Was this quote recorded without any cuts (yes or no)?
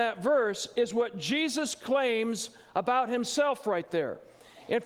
yes